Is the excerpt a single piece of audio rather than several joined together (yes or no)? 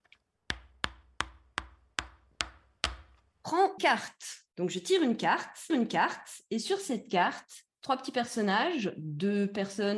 no